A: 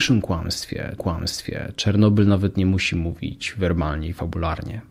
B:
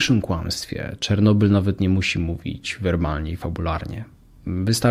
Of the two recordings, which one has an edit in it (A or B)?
A